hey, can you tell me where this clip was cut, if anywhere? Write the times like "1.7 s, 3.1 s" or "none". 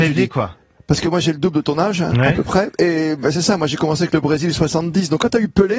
none